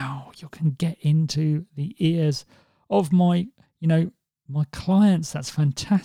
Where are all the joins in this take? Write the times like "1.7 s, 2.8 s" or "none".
none